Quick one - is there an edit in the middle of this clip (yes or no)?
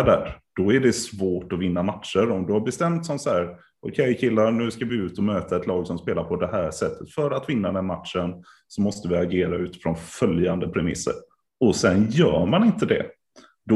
no